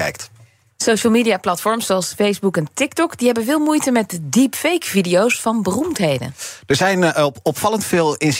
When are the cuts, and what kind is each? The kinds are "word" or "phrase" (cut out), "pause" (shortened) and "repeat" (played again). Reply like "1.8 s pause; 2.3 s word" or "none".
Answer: none